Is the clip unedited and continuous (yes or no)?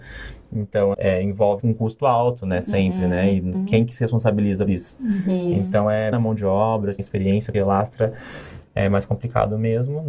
no